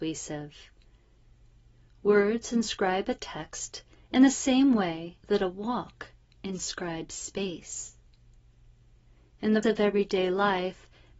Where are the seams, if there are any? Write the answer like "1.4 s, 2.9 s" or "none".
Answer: 5.2 s, 9.6 s

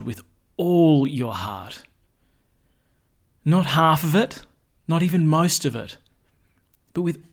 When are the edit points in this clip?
4.7 s

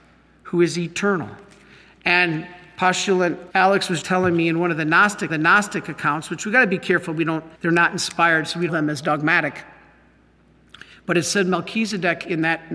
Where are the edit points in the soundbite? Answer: 3.5 s, 4.0 s, 5.3 s, 7.5 s, 8.7 s

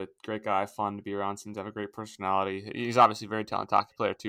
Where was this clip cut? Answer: none

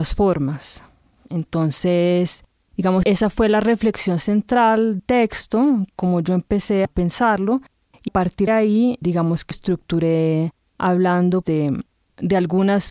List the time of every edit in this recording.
3.0 s, 5.0 s, 5.9 s, 6.8 s, 8.1 s, 8.5 s, 9.0 s, 9.5 s, 11.4 s

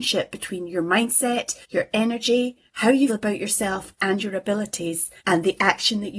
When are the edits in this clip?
1.6 s, 2.7 s, 3.1 s, 5.2 s

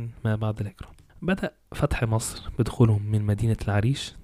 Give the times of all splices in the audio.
none

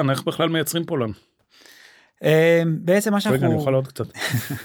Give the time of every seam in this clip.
none

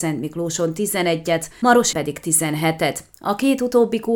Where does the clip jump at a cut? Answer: 1.9 s

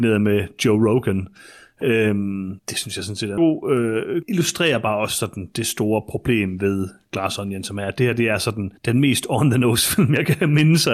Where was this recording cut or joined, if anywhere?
2.6 s, 3.4 s, 4.2 s, 8.8 s

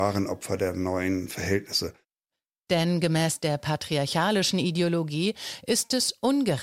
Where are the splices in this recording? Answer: none

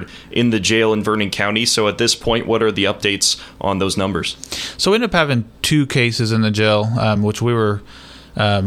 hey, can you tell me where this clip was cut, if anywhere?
none

